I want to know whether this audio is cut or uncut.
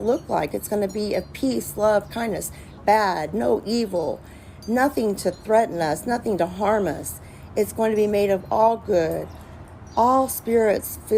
cut